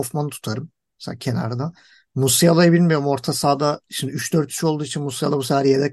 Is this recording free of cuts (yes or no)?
yes